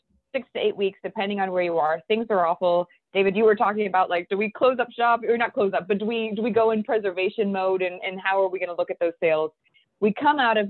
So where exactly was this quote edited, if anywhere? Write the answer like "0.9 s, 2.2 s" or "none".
none